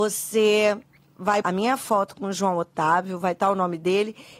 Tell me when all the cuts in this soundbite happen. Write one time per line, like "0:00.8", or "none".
0:01.4